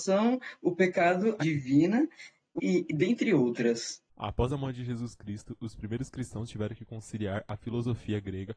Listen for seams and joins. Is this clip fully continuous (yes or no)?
no